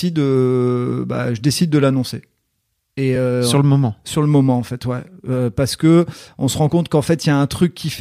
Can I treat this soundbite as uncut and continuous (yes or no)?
yes